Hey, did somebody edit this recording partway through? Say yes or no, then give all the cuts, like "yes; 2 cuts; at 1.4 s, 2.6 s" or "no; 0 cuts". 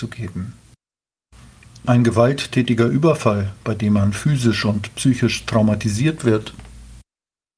no; 0 cuts